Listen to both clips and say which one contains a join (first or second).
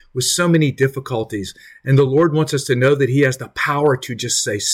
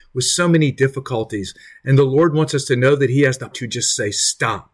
second